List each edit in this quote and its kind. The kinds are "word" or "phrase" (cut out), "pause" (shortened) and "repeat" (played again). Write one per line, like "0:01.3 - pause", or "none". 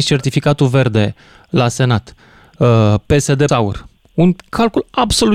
0:03.5 - word